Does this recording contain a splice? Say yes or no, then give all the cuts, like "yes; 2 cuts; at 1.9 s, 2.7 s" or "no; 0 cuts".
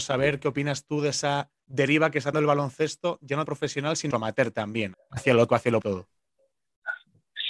yes; 7 cuts; at 1.6 s, 2.3 s, 3.5 s, 4.1 s, 4.9 s, 5.5 s, 5.8 s